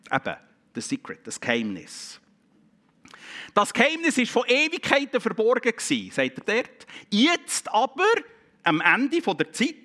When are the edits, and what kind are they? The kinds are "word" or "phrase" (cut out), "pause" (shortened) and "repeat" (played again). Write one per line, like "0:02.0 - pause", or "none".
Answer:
0:06.4 - word

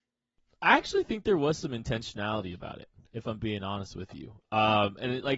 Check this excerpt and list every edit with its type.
none

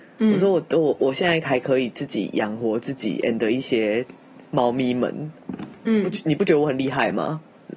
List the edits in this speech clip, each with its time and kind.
none

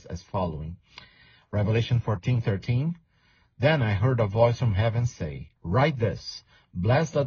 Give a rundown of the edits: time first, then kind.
0:05.6 - pause

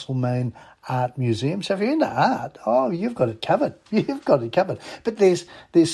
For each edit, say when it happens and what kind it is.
none

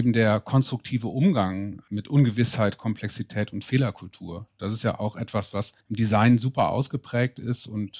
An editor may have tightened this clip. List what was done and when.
0:05.8 - pause

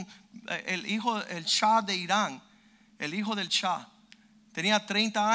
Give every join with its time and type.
none

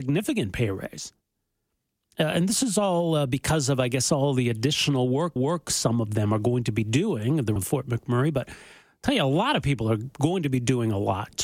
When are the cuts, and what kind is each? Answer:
0:05.4 - repeat
0:07.6 - word

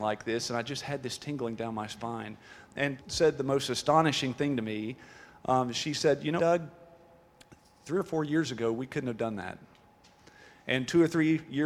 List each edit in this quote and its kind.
0:03.0 - word
0:06.4 - word

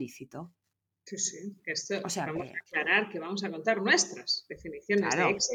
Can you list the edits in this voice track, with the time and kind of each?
none

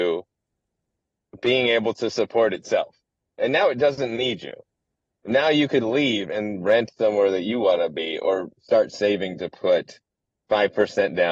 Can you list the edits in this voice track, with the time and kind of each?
none

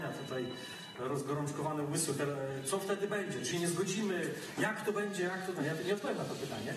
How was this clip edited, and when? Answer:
0:03.5 - phrase

